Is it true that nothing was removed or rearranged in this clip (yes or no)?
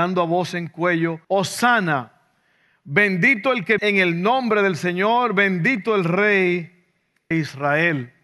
no